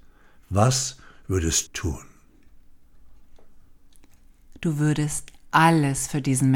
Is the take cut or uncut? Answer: cut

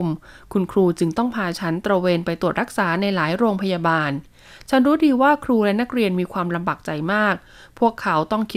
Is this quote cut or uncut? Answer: uncut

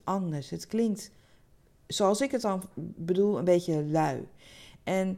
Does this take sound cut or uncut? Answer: uncut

